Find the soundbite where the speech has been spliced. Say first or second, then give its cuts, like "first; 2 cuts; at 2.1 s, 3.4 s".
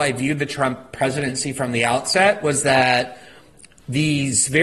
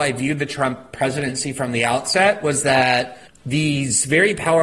second; 1 cut; at 3.3 s